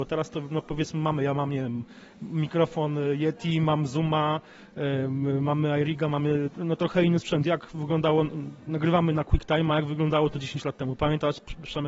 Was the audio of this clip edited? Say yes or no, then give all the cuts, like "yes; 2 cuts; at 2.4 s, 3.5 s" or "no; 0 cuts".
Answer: no; 0 cuts